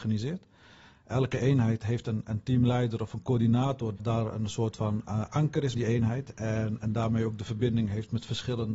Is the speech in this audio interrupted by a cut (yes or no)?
yes